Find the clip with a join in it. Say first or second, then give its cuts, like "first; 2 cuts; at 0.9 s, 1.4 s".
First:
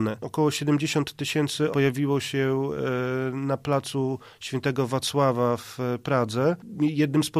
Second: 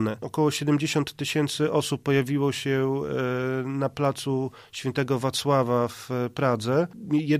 first; 1 cut; at 1.7 s